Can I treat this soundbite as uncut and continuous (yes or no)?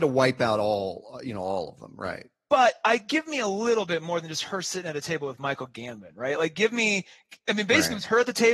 yes